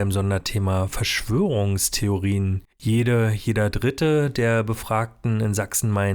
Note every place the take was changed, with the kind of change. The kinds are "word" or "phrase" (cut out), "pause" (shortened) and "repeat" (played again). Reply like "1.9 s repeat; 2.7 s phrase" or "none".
2.7 s pause